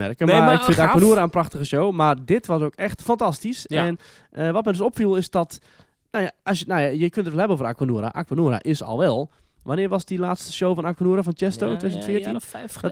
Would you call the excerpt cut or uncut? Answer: uncut